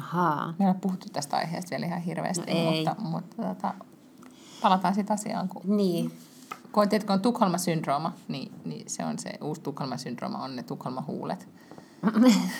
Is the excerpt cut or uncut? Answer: uncut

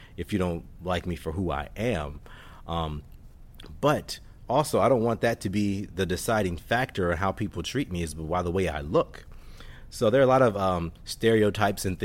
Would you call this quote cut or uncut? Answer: uncut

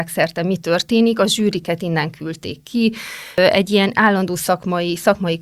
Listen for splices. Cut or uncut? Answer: uncut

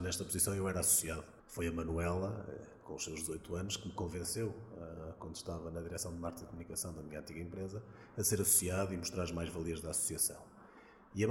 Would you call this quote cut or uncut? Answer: cut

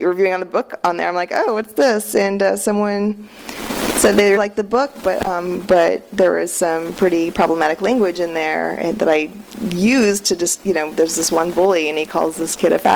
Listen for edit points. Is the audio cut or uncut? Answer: cut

